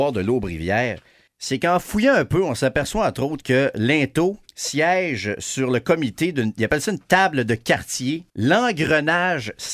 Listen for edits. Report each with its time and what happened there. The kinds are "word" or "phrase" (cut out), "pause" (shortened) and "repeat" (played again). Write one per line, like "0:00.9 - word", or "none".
0:01.3 - pause
0:04.5 - pause
0:08.3 - pause